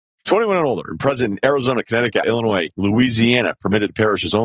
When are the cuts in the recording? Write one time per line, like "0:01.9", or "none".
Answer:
0:02.2